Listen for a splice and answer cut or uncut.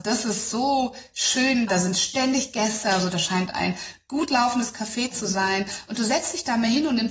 cut